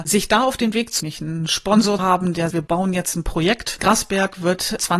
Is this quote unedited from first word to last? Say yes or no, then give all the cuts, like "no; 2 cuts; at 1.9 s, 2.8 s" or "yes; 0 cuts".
no; 3 cuts; at 1.0 s, 2.0 s, 2.5 s